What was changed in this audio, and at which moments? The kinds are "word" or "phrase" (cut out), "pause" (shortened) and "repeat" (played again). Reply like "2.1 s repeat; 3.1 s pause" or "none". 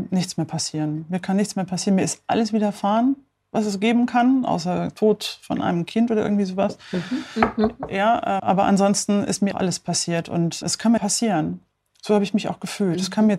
8.4 s word; 9.5 s word; 10.6 s word; 11.0 s phrase